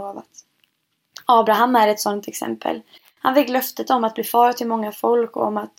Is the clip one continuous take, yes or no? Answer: yes